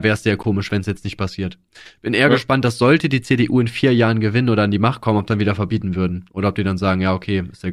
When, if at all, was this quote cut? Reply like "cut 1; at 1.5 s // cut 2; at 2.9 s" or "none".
cut 1; at 5.3 s